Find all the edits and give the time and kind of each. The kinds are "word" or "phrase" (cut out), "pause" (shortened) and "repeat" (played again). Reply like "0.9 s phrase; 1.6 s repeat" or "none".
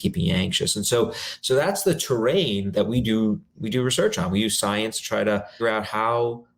2.7 s word; 5.6 s word